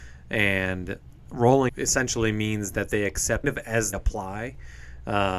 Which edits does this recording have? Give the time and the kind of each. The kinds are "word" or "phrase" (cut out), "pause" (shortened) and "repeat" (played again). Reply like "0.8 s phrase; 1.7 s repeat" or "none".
1.7 s word; 3.4 s phrase; 3.9 s word